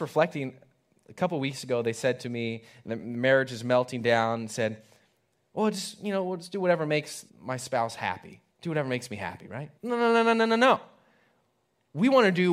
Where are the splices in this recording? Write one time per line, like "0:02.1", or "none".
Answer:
0:07.3
0:08.5
0:09.8